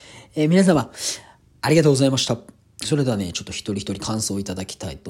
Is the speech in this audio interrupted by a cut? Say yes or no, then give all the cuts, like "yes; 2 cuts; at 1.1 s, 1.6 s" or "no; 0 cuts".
no; 0 cuts